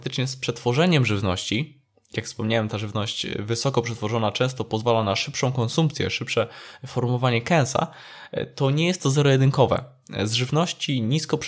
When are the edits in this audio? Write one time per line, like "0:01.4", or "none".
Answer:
none